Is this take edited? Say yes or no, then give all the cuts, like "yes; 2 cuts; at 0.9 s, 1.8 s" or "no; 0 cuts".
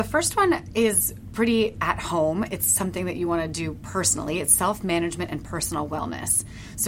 no; 0 cuts